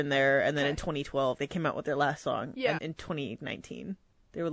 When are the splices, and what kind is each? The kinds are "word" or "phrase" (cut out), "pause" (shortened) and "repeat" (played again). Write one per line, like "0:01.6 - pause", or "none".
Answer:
0:01.4 - word
0:02.8 - word
0:03.4 - word